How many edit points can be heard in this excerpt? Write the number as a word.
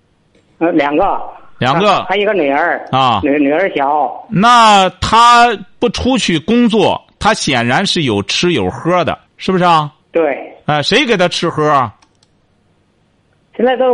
two